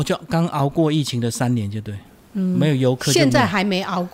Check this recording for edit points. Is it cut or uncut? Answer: uncut